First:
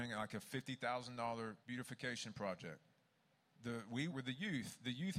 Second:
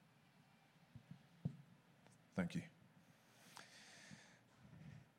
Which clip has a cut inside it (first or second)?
first